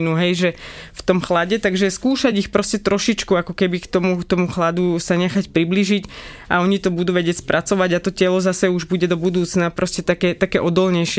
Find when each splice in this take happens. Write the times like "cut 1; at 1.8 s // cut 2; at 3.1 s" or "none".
none

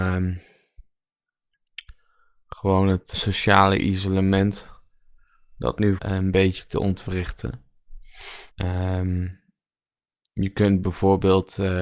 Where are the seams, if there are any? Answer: cut 1; at 3.1 s // cut 2; at 6.0 s // cut 3; at 8.5 s

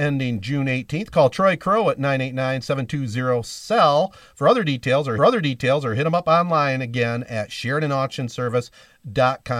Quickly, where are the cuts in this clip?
cut 1; at 5.2 s

